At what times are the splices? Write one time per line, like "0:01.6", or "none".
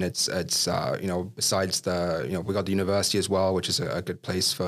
none